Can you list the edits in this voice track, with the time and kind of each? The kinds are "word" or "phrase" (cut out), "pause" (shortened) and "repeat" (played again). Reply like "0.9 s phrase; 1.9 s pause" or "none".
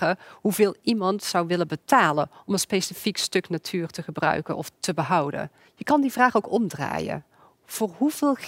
5.7 s pause

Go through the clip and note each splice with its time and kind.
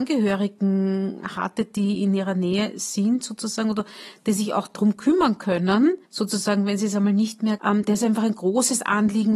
6.0 s pause; 7.6 s word

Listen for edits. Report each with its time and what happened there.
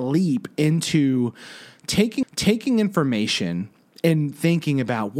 2.2 s repeat

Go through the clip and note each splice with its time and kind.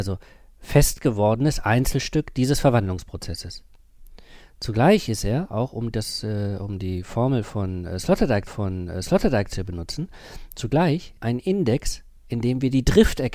8.5 s repeat; 11.2 s phrase; 12.2 s pause

